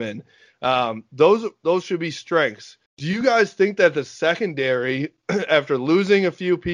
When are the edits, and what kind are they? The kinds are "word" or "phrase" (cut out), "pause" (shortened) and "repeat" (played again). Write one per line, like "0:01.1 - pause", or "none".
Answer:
0:02.9 - pause